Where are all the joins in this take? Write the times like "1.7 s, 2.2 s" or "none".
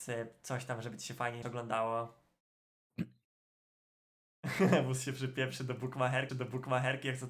1.4 s, 6.3 s

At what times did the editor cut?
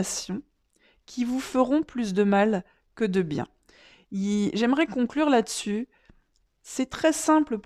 none

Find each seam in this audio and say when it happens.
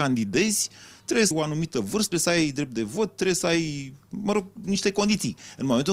1.3 s, 2.1 s

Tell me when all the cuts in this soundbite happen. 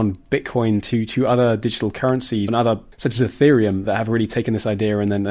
2.5 s, 2.9 s, 3.8 s

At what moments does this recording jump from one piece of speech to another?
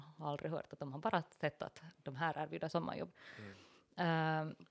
none

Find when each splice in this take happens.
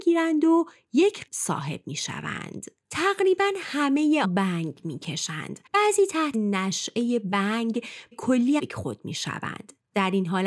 1.3 s, 4.2 s, 5.7 s, 6.3 s, 8.1 s, 8.6 s

